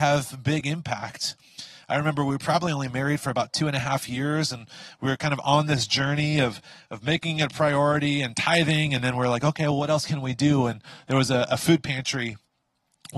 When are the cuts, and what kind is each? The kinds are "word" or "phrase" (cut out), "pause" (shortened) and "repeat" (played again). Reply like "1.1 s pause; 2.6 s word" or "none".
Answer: none